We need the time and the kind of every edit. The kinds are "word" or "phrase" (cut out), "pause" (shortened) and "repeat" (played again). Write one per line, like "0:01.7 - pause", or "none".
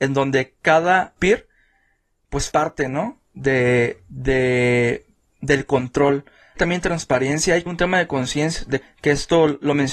0:01.2 - word
0:02.5 - word
0:06.6 - word
0:07.7 - word
0:08.8 - word